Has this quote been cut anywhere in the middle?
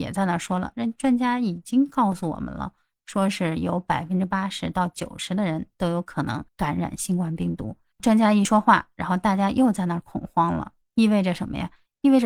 yes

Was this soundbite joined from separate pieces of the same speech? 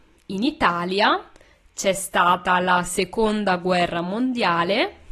no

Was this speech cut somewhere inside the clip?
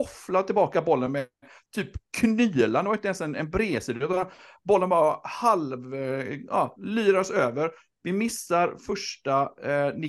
no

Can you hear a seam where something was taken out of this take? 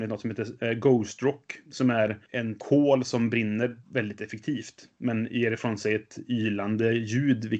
yes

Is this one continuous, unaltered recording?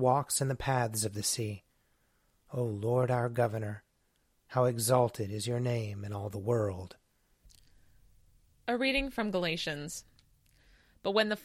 yes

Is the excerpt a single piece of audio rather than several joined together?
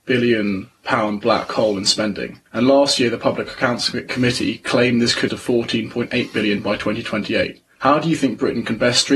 no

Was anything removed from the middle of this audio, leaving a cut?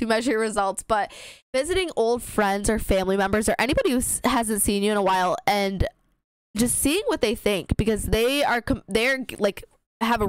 yes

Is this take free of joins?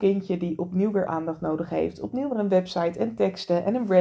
no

